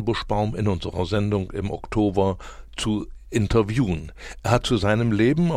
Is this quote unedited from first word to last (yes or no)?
yes